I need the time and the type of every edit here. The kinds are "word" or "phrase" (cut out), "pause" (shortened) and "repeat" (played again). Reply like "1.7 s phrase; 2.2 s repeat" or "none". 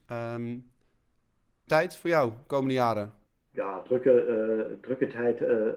1.7 s word; 3.3 s pause